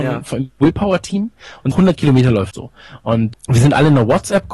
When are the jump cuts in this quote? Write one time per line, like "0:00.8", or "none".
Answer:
0:01.7
0:02.5
0:03.3

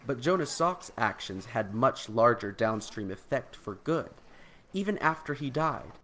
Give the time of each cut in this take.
none

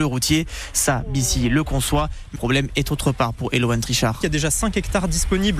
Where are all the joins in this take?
0:02.4

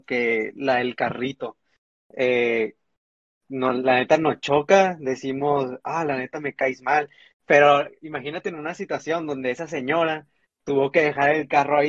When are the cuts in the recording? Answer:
none

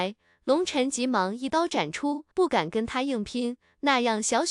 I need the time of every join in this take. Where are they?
0:02.3

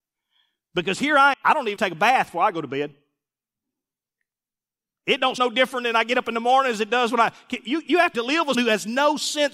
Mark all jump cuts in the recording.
0:01.3
0:01.8
0:05.4
0:08.1
0:08.5

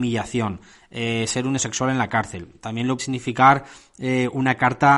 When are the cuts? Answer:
0:01.6
0:03.0

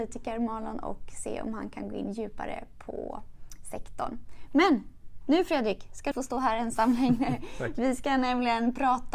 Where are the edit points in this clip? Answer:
0:06.1

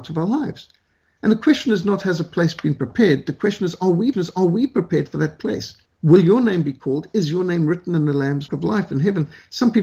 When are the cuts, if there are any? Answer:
0:04.1
0:05.9
0:08.5

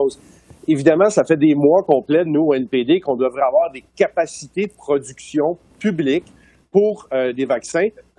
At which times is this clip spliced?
none

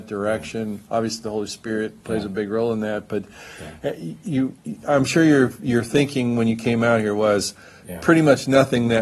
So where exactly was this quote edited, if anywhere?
none

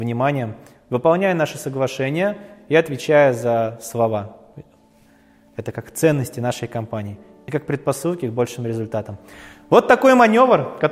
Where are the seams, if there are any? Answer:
none

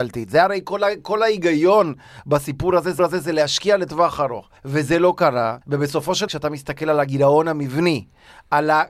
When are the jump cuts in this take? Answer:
0:03.0
0:04.6
0:05.6
0:06.3

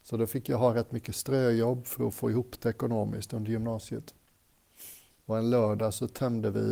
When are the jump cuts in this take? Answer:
0:05.1

